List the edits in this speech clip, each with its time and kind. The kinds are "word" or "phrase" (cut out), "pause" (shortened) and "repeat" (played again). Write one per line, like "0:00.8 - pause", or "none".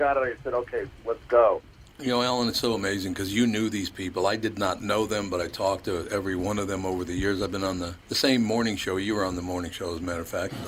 0:01.8 - pause
0:08.0 - pause